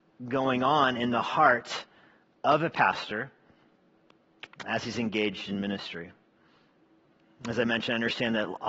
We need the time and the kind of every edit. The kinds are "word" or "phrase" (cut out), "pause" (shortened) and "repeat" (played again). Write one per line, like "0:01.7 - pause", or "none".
none